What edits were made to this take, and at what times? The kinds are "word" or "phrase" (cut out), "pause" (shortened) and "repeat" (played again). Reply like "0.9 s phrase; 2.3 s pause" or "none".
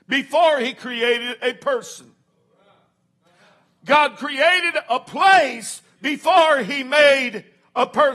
none